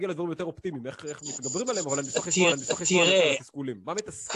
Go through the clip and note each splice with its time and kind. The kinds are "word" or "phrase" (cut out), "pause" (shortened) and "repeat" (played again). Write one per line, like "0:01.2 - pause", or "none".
0:02.5 - repeat